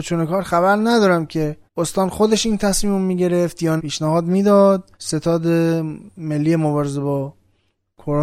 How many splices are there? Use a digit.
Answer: 3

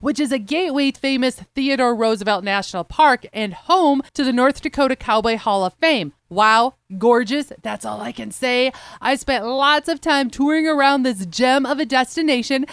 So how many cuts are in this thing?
3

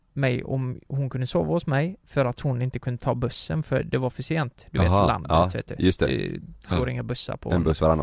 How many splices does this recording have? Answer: 0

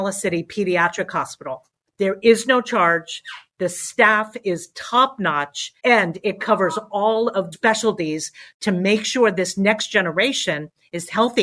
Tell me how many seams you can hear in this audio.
3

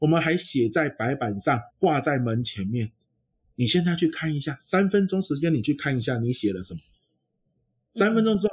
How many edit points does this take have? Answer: 1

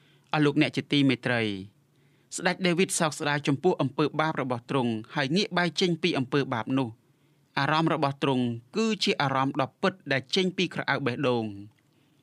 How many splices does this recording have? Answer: 0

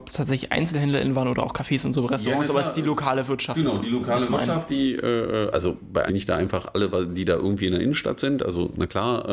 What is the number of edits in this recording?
1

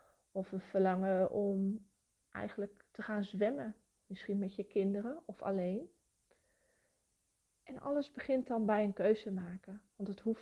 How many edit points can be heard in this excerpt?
0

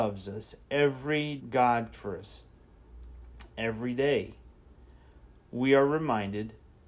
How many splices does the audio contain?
2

